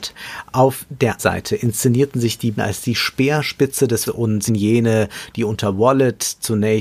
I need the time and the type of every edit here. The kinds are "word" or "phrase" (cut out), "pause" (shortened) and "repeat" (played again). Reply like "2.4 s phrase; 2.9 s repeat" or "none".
1.2 s word; 2.5 s word; 4.1 s word; 4.5 s word